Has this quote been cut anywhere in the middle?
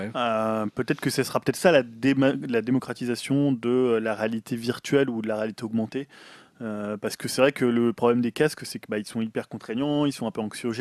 no; 0 cuts

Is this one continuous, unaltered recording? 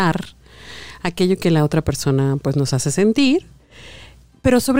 yes; 0 cuts

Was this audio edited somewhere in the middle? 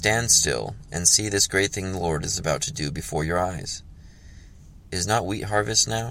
no; 0 cuts

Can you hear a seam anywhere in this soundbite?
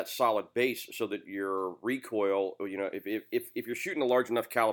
no; 0 cuts

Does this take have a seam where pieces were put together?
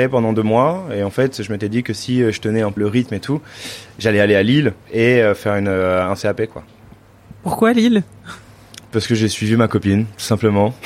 yes; 2 cuts; at 2.8 s, 4.8 s

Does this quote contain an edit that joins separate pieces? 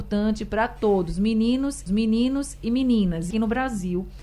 yes; 2 cuts; at 1.9 s, 3.3 s

